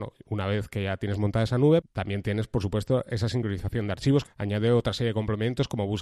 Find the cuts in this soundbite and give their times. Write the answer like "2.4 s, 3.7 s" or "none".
1.8 s